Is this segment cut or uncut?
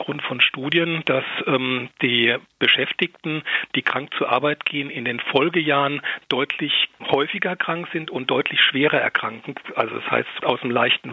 uncut